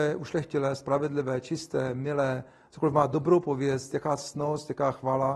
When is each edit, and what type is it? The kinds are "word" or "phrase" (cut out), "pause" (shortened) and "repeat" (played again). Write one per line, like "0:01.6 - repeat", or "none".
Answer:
none